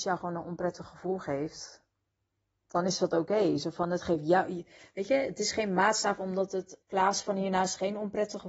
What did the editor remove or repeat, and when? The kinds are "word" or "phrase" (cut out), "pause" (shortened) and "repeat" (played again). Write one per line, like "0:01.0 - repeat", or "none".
0:06.8 - word